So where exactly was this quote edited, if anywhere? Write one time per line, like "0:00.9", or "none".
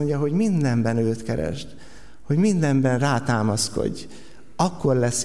none